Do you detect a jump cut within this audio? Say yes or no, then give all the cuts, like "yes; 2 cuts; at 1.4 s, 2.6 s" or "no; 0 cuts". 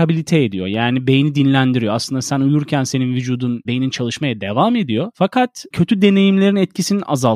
yes; 2 cuts; at 3.6 s, 5.7 s